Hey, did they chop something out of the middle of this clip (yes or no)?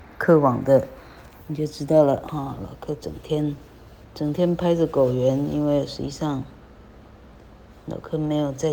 yes